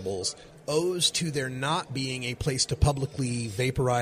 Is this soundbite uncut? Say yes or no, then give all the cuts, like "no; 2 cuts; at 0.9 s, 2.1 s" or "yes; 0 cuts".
yes; 0 cuts